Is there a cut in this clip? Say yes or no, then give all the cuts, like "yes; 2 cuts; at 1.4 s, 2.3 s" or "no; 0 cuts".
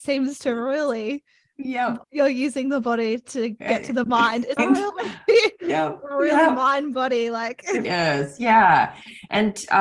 yes; 3 cuts; at 2.0 s, 4.6 s, 7.8 s